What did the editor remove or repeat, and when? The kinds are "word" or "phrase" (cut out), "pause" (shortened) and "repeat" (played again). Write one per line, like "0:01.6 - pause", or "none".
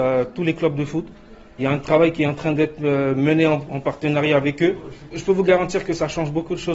none

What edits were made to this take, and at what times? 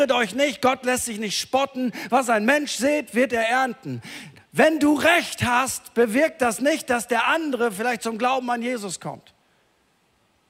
none

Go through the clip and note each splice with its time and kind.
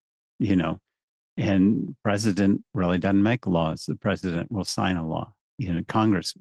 none

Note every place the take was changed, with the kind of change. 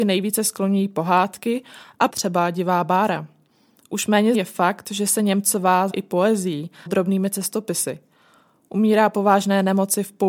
0:02.1 - word
0:04.3 - word
0:05.9 - word
0:06.9 - word

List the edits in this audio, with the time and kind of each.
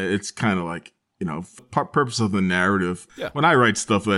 0:01.1 - word
0:01.6 - phrase

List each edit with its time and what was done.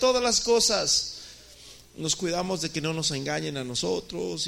0:01.8 - phrase

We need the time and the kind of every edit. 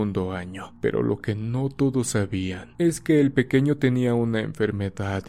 none

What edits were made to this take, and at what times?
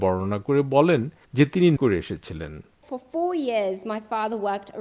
0:01.8 - word

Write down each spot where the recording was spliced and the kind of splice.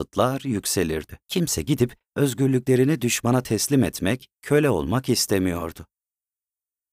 0:01.2 - pause
0:04.3 - pause

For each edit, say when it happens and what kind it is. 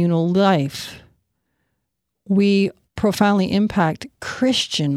0:02.8 - pause

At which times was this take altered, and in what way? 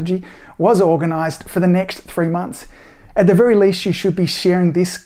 none

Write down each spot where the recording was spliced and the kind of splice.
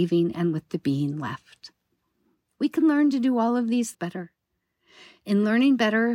0:03.9 - word

